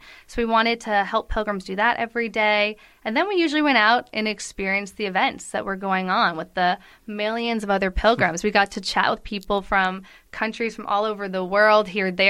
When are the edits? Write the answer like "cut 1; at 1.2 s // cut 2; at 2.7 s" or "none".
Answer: none

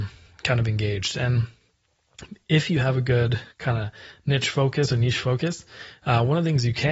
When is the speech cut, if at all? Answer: cut 1; at 3.5 s

